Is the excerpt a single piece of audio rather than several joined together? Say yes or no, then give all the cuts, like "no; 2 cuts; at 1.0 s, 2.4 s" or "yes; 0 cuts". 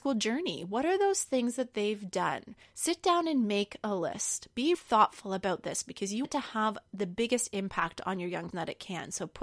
no; 3 cuts; at 4.7 s, 6.2 s, 8.5 s